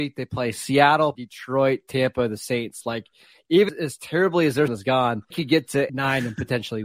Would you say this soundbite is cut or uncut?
cut